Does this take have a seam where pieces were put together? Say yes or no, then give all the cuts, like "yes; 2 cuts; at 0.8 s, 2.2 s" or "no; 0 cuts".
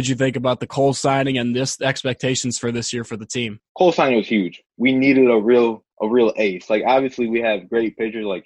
yes; 2 cuts; at 3.7 s, 5.9 s